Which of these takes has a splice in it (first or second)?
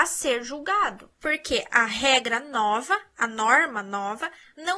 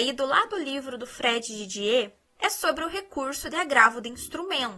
first